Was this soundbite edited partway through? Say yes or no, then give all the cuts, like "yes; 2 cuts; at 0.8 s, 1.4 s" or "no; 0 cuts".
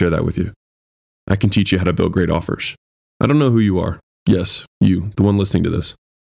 no; 0 cuts